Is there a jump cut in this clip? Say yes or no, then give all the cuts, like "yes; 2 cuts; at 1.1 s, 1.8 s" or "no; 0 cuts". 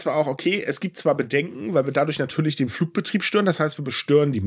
no; 0 cuts